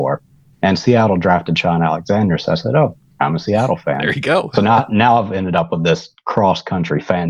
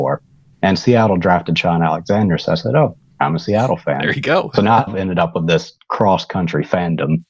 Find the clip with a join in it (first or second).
second